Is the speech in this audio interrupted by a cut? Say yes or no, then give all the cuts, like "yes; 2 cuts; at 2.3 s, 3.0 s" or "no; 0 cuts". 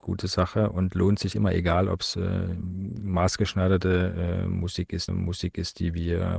yes; 2 cuts; at 1.3 s, 5.1 s